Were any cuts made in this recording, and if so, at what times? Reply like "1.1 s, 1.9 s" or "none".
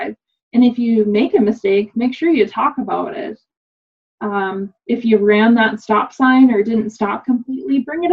none